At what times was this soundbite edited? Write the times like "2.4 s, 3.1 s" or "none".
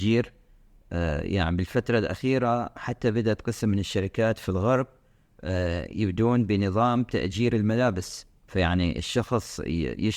8.4 s